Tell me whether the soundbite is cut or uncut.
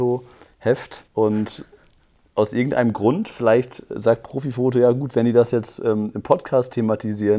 cut